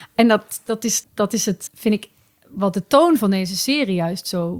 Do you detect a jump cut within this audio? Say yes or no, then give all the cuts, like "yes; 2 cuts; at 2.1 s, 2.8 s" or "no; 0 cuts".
yes; 2 cuts; at 1.0 s, 1.7 s